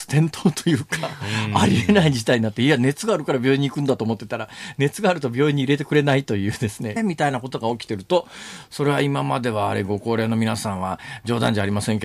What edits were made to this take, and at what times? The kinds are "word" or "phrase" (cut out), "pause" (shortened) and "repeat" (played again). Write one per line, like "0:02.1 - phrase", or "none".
0:07.0 - phrase